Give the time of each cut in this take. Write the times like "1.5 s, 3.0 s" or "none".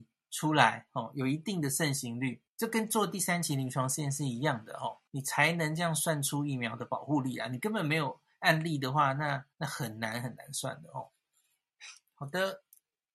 2.5 s, 5.1 s, 9.5 s